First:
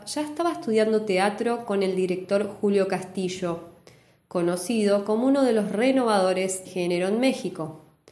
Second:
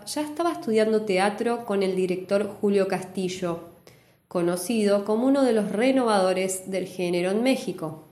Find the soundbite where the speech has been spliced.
first; 1 cut; at 6.6 s

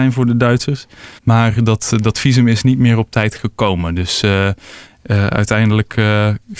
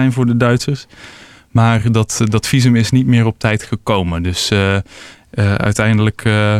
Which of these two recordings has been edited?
first; 1 cut; at 1.2 s

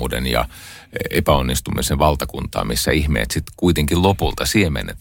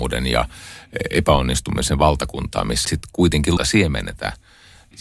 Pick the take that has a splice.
second; 2 cuts; at 2.8 s, 3.6 s

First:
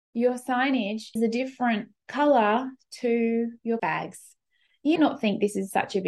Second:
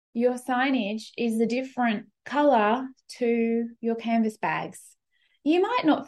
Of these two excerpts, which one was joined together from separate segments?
first; 3 cuts; at 1.2 s, 3.8 s, 5.0 s

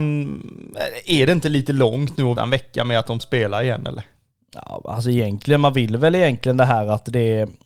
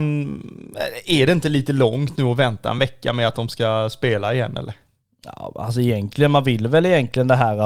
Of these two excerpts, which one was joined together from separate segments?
first; 2 cuts; at 2.4 s, 3.2 s

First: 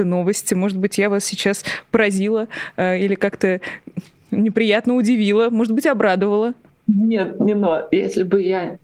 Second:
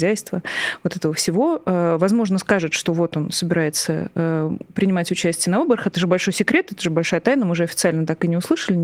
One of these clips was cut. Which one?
first; 1 cut; at 6.7 s

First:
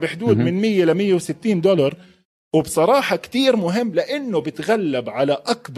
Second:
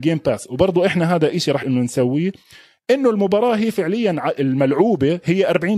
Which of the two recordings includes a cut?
second; 1 cut; at 1.6 s

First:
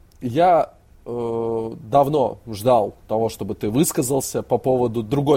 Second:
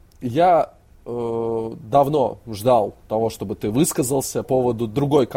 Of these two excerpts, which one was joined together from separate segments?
second; 1 cut; at 4.4 s

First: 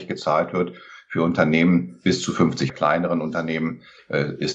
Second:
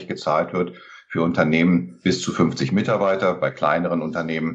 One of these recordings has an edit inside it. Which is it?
first; 1 cut; at 2.7 s

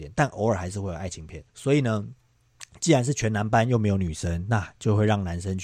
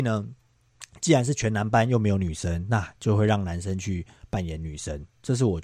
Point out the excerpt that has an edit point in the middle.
first; 1 cut; at 1.5 s

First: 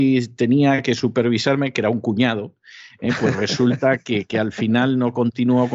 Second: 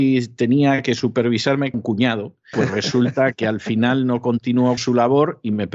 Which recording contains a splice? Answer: second; 4 cuts; at 1.7 s, 2.5 s, 3.3 s, 4.8 s

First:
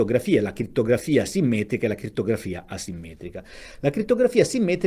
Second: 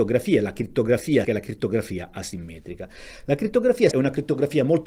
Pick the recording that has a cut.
second; 2 cuts; at 1.2 s, 3.9 s

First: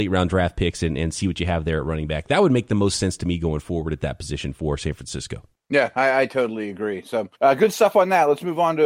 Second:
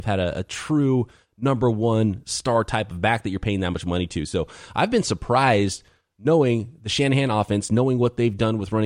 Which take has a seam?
first; 2 cuts; at 5.5 s, 7.3 s

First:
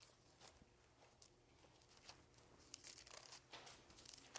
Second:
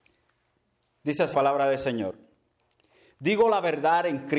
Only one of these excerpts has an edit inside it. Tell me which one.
second; 1 cut; at 1.3 s

